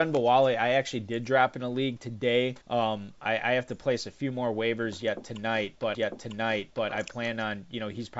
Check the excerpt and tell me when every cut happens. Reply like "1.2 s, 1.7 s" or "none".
2.6 s, 5.9 s